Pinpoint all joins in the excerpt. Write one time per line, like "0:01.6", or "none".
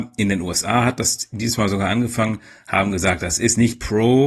none